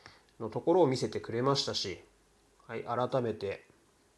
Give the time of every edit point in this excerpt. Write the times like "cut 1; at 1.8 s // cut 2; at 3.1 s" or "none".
none